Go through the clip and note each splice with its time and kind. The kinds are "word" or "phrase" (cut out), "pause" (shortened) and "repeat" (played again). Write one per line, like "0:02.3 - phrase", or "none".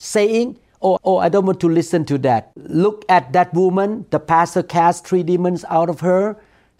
0:01.0 - repeat

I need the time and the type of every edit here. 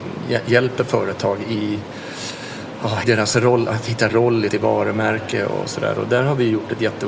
0:03.0 - word
0:04.1 - phrase
0:04.5 - word

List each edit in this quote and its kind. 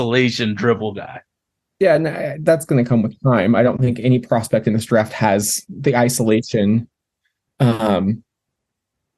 none

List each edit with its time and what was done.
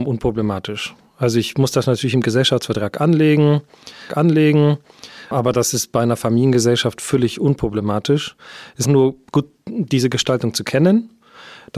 0:04.1 - repeat
0:08.8 - word

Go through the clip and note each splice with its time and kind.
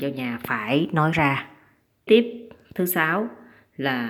0:01.1 - word
0:02.1 - word

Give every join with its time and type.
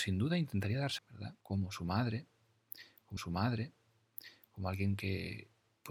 0:01.0 - phrase
0:01.4 - pause
0:03.2 - repeat

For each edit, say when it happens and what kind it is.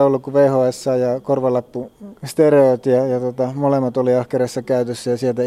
0:02.2 - pause

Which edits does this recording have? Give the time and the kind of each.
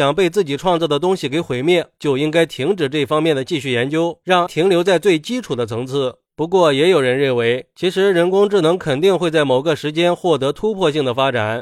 0:04.5 - word

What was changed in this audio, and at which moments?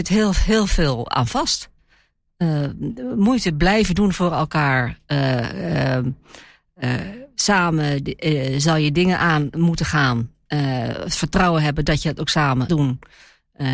0:12.7 - word

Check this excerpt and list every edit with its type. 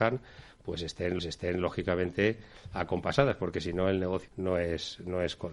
0:01.2 - repeat
0:04.3 - word

